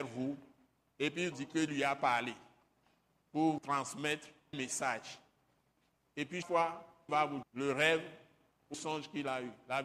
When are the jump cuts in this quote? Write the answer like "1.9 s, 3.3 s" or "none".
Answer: 1.3 s, 1.7 s, 3.6 s, 4.5 s, 6.4 s, 7.1 s, 7.4 s, 8.7 s